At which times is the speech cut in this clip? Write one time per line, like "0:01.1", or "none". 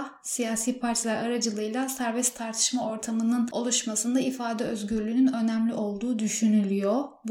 none